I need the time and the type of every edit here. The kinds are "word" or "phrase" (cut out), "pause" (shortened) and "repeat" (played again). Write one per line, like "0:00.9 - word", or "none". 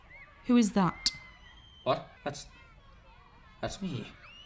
0:02.2 - pause